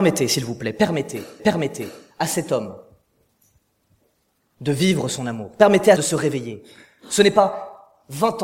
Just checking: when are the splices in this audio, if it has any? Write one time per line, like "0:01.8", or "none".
0:01.4
0:06.0